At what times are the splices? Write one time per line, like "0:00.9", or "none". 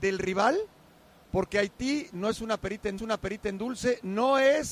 0:03.0

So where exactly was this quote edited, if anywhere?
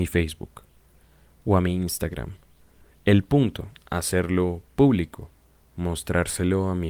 none

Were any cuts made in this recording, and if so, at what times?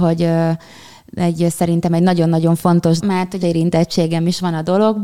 0:03.0
0:03.4

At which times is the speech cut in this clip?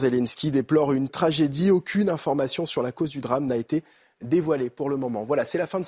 0:01.1

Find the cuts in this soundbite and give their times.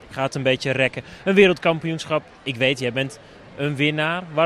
none

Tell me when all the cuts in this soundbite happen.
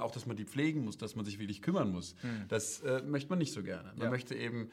none

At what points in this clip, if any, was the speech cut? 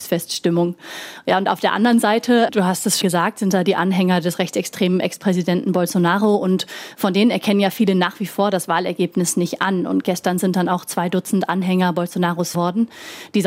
0:03.0
0:12.5

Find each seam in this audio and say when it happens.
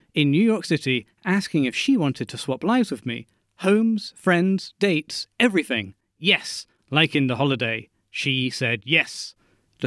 none

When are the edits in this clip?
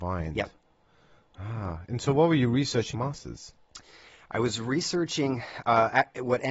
0:02.9

